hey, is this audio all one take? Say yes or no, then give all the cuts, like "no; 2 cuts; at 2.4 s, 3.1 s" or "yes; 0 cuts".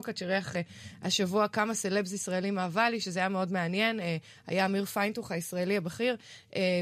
yes; 0 cuts